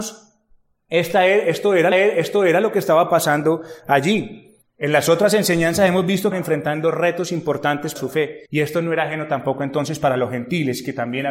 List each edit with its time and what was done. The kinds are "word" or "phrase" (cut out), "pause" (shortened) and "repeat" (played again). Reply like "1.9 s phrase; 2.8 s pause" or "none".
1.9 s repeat; 4.6 s pause; 6.3 s phrase; 8.0 s word; 8.5 s pause